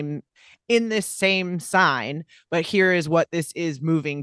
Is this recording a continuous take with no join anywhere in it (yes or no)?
yes